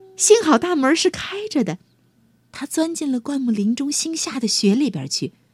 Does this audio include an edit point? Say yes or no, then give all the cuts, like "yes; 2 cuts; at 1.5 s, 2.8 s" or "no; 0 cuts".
yes; 1 cut; at 2.1 s